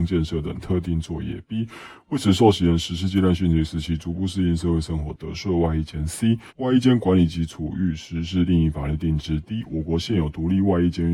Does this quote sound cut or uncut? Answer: cut